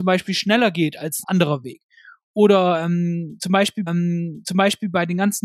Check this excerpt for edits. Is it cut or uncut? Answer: cut